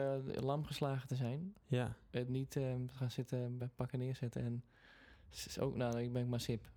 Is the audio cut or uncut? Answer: uncut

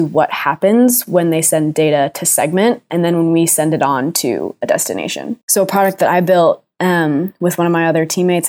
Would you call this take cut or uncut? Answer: cut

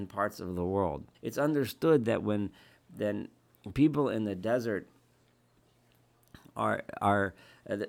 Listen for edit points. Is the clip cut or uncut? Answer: cut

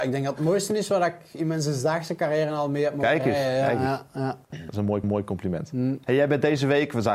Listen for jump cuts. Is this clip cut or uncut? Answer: cut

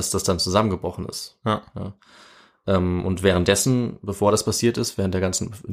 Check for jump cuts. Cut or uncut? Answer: uncut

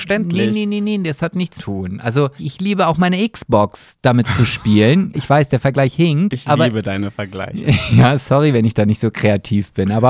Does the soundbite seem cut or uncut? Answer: cut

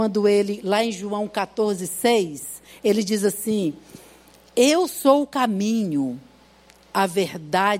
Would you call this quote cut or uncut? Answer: uncut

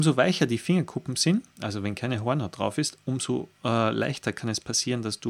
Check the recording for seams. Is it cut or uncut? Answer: uncut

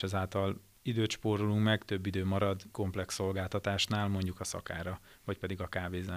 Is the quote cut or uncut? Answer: cut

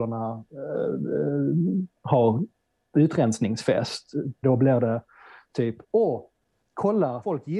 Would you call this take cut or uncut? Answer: cut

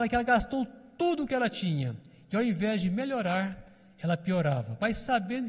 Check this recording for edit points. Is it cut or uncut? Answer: uncut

